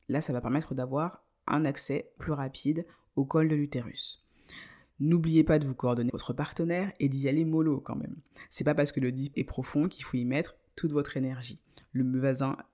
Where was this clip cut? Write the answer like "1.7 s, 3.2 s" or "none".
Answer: 2.2 s, 6.1 s, 9.3 s